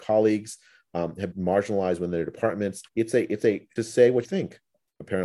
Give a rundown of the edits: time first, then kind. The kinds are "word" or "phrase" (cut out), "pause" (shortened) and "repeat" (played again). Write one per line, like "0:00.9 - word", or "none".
0:01.3 - word
0:02.9 - pause
0:03.8 - phrase
0:04.2 - word